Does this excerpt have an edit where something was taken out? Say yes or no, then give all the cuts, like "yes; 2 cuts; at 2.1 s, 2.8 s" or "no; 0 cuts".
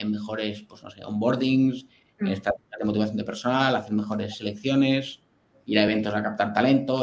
no; 0 cuts